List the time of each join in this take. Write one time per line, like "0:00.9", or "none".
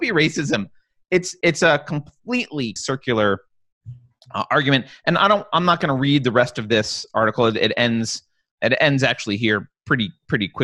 0:02.8
0:08.5

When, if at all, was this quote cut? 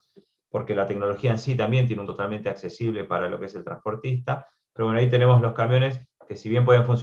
0:02.0

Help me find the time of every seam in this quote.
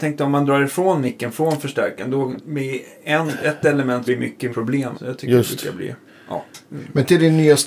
0:02.4
0:04.1
0:04.5
0:04.9
0:06.1

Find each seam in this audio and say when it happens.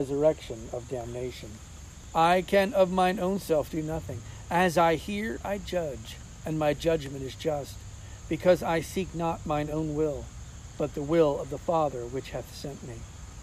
none

